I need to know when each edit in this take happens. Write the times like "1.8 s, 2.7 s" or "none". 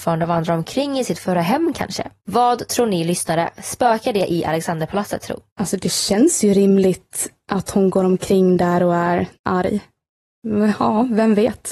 2.2 s, 5.5 s, 9.3 s